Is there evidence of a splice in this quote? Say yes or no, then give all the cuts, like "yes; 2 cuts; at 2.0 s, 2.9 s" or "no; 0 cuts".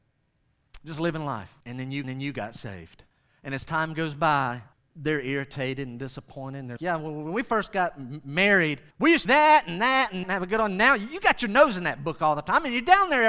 yes; 8 cuts; at 1.6 s, 2.0 s, 3.1 s, 4.7 s, 6.8 s, 8.9 s, 9.3 s, 10.2 s